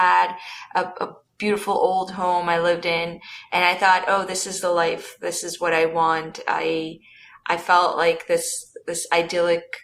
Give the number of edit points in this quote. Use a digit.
0